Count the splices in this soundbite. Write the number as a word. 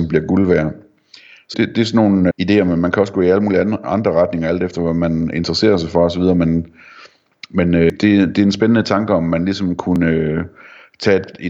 two